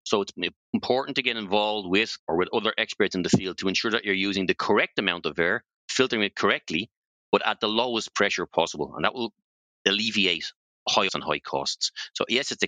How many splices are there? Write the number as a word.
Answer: two